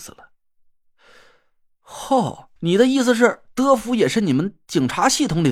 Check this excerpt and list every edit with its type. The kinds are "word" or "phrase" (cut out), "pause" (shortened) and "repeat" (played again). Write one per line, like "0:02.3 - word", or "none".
0:02.6 - pause